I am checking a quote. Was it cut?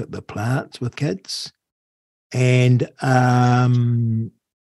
yes; 1 cut; at 0.9 s

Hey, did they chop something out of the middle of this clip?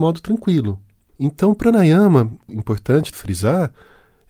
yes; 2 cuts; at 2.5 s, 3.1 s

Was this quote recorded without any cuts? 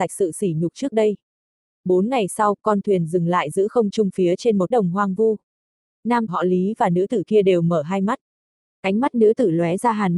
no; 2 cuts; at 4.7 s, 6.3 s

